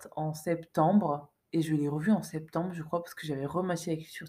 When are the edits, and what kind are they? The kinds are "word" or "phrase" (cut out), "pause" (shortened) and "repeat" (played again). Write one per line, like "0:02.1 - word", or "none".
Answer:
0:01.4 - pause